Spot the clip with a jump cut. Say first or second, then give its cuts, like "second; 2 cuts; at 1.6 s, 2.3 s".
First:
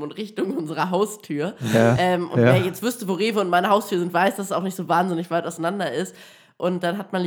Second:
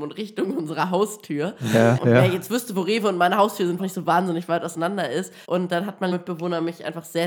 second; 4 cuts; at 2.0 s, 3.8 s, 5.4 s, 6.1 s